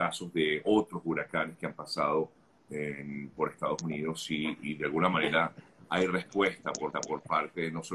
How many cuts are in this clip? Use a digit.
1